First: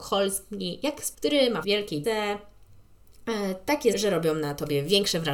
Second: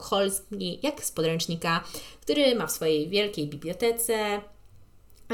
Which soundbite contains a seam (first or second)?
first